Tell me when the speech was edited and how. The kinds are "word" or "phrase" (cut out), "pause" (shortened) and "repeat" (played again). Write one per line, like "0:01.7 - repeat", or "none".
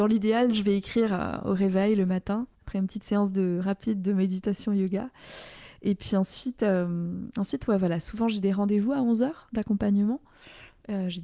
0:02.5 - pause